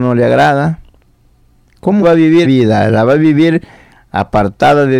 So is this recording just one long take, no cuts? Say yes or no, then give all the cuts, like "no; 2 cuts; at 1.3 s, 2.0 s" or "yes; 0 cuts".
no; 2 cuts; at 2.0 s, 2.4 s